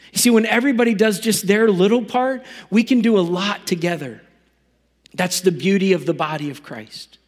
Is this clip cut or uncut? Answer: uncut